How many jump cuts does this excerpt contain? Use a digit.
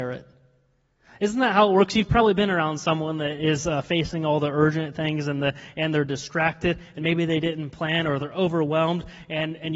0